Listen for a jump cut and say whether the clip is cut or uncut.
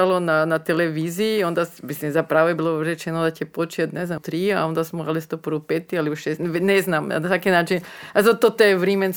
cut